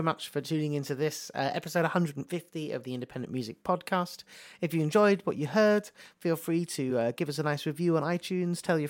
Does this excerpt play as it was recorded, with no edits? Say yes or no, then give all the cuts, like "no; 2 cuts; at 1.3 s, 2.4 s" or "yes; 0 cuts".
yes; 0 cuts